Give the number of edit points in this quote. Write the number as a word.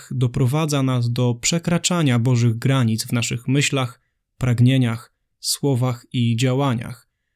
zero